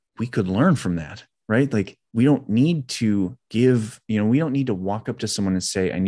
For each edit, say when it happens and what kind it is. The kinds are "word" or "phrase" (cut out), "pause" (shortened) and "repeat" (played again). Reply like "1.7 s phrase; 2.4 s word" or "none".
2.0 s pause; 3.4 s pause